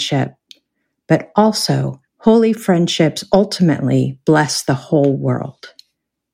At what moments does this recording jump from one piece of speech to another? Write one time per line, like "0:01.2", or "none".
0:02.1